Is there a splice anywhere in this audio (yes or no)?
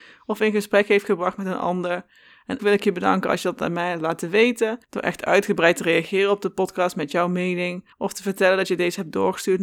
yes